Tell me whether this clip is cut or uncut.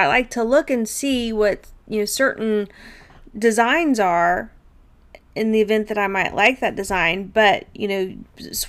uncut